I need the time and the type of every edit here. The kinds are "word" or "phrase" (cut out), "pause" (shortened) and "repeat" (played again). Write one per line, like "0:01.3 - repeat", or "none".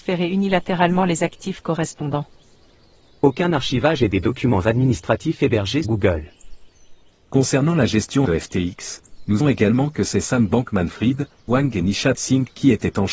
0:05.8 - word
0:08.2 - word
0:09.4 - word
0:11.5 - word